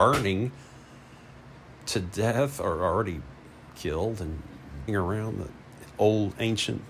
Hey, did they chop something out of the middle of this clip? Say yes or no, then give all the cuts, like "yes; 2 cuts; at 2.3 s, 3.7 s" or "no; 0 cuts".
yes; 1 cut; at 4.9 s